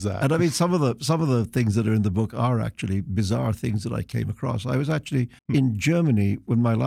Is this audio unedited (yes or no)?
no